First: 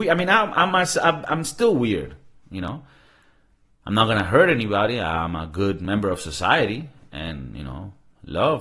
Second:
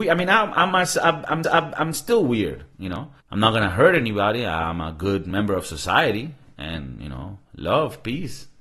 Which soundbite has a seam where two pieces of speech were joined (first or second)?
second